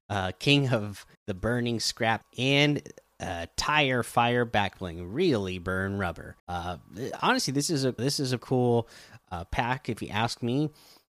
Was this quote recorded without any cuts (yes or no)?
no